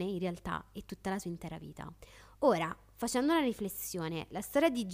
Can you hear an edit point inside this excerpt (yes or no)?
no